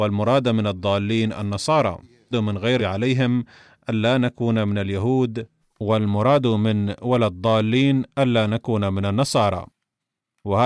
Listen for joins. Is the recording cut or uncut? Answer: cut